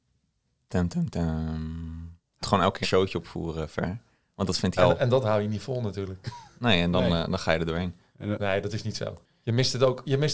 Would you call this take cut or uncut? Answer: cut